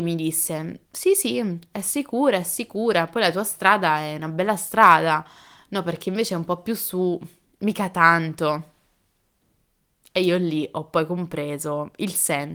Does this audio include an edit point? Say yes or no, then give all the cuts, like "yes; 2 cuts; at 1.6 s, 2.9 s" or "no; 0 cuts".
no; 0 cuts